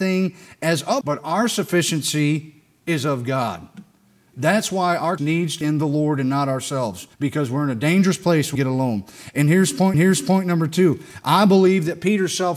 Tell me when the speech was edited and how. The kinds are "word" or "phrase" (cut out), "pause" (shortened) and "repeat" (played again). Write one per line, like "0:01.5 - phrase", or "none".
0:01.0 - word
0:05.2 - word
0:05.6 - word
0:07.1 - pause
0:08.6 - word
0:09.9 - repeat